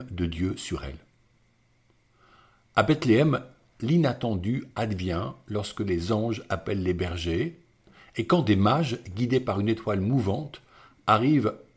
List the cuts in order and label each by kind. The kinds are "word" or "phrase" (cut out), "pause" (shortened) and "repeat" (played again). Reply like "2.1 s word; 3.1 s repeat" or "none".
none